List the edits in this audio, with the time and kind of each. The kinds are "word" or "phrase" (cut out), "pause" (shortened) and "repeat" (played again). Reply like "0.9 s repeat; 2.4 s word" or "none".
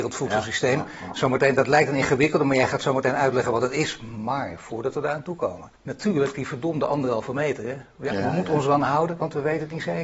5.8 s pause